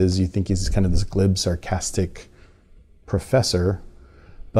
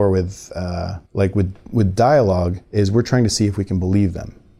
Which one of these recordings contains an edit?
second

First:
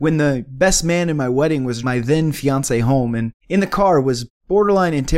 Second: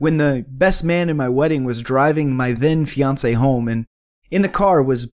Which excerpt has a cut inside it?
first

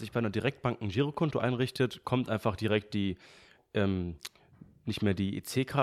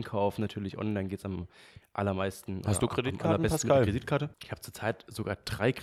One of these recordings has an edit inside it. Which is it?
second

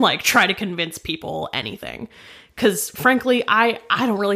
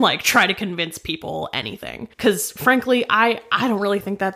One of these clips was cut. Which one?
second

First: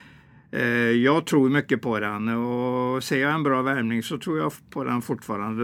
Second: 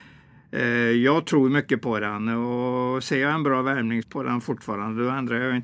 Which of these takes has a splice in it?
second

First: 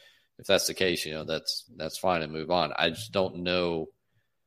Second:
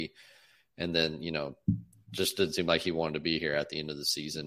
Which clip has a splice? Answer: first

